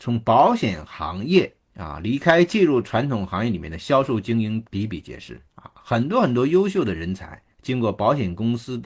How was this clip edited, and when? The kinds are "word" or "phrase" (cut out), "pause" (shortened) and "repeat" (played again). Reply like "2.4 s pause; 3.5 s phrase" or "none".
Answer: 1.6 s pause; 5.5 s pause; 7.5 s pause